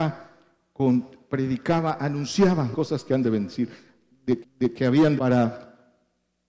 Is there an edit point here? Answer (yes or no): yes